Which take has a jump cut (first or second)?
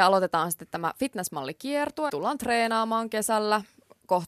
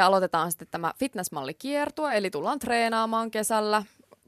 first